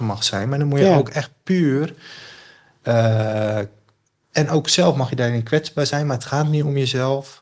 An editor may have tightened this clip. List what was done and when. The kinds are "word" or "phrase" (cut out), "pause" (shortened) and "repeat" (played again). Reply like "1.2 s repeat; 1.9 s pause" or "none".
none